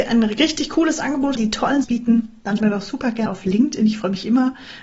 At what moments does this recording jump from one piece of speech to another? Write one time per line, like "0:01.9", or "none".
0:01.4
0:01.8
0:02.6
0:03.3

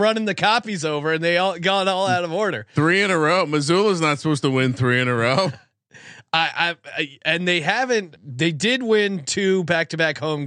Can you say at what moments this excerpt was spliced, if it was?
0:08.2

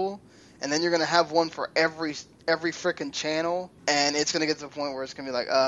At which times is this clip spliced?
0:03.8

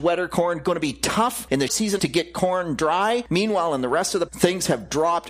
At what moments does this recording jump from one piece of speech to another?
0:01.7
0:02.0
0:04.3

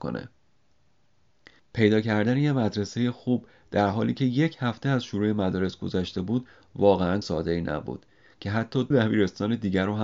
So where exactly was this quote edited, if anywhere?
0:07.2
0:08.9

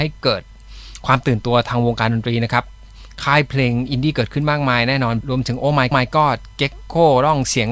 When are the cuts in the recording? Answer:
0:05.2
0:05.9

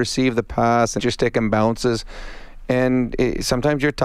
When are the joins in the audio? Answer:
0:01.0

